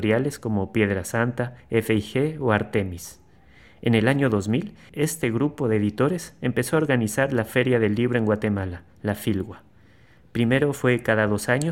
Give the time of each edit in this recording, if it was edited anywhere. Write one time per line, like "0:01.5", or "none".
none